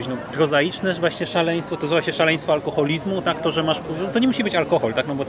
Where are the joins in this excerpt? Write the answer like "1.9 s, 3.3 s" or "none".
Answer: none